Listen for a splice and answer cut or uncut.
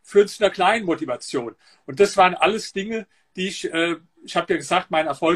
uncut